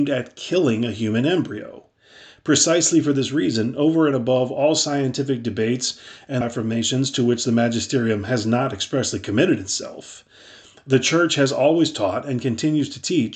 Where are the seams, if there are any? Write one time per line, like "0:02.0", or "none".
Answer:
0:06.4